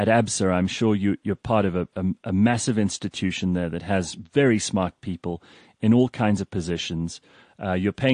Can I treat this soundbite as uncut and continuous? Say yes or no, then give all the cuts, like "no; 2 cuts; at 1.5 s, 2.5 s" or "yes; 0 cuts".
yes; 0 cuts